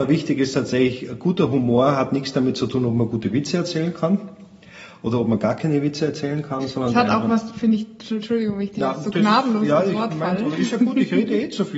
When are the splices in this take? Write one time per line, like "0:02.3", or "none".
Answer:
none